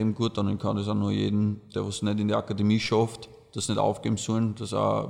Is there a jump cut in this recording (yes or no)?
no